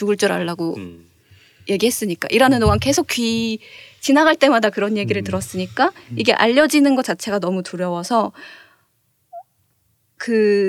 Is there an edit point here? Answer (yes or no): no